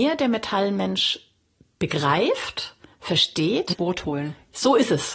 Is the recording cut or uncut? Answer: cut